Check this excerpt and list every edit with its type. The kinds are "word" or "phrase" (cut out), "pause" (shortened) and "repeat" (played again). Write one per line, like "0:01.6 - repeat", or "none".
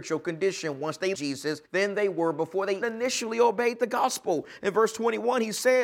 0:01.1 - word
0:01.6 - pause
0:02.8 - word